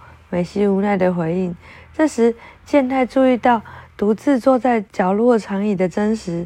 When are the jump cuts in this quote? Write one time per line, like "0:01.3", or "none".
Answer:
0:04.9